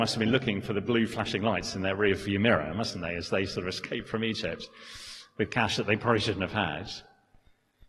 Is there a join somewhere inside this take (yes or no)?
no